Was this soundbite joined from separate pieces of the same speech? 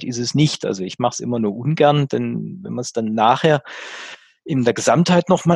no; 0 cuts

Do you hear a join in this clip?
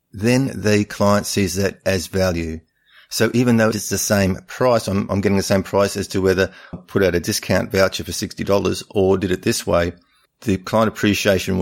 yes; 3 cuts; at 3.7 s, 6.7 s, 10.3 s

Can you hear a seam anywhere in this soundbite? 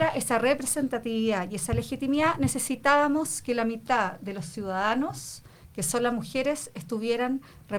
no; 0 cuts

